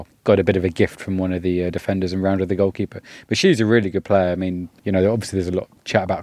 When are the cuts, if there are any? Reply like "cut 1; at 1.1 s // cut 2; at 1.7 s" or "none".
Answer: cut 1; at 4.8 s